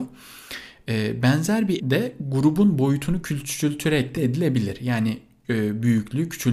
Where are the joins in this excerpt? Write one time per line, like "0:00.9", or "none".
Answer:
0:01.8
0:04.2
0:05.4

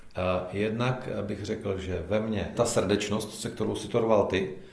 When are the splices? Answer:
0:02.5

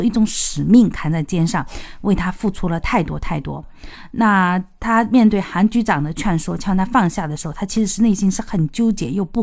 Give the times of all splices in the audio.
none

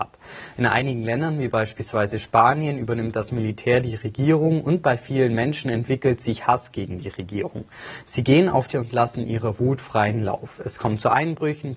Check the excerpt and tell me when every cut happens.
0:08.7

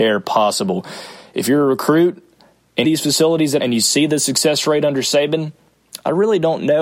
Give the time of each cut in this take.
0:02.8
0:03.6

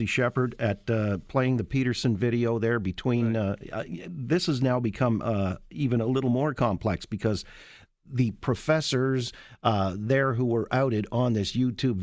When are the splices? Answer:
none

